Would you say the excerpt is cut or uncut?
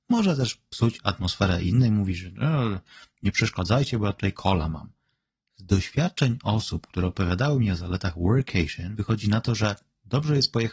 uncut